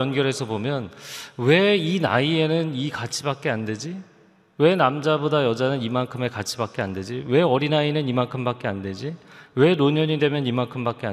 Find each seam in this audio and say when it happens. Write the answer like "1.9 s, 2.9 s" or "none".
none